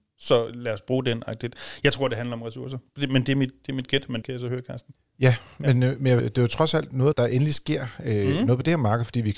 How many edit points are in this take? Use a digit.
3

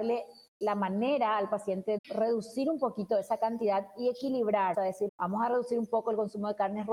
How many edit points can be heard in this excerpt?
3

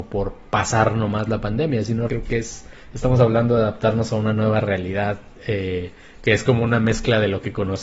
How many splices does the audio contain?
1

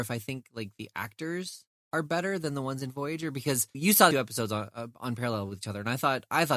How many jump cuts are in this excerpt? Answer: 2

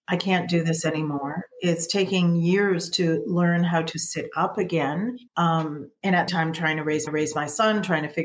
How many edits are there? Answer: 4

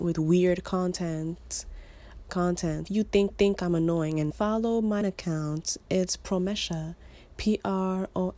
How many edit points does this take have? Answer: 5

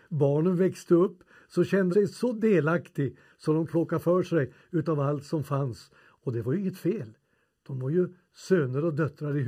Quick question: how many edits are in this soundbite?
2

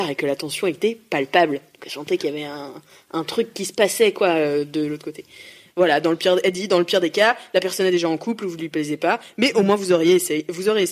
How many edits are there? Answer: 0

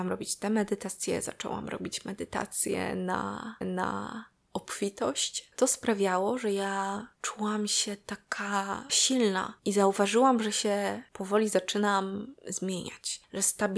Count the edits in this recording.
3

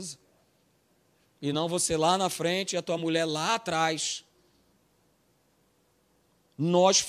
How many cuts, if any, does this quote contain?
0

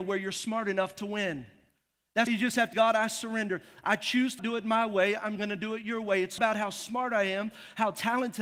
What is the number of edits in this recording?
4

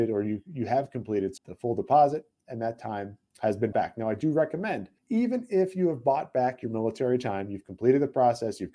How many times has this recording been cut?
4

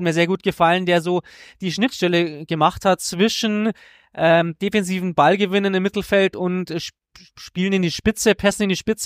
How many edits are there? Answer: 0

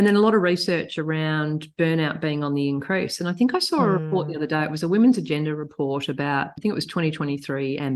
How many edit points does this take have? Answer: 1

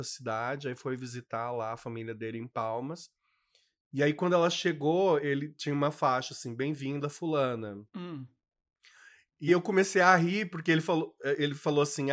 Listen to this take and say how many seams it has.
1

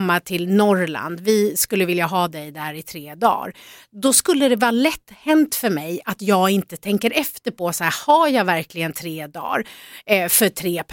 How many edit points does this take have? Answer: 0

